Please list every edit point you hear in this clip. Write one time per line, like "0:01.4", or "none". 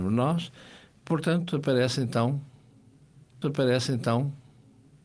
0:03.4